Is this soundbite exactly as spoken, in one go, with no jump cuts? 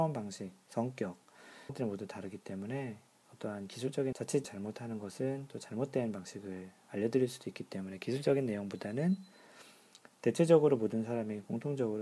no; 3 cuts; at 1.7 s, 4.1 s, 4.4 s

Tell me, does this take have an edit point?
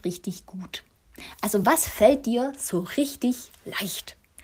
no; 0 cuts

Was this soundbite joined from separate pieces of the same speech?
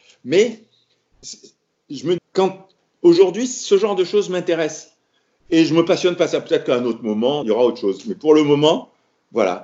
yes; 2 cuts; at 2.2 s, 7.4 s

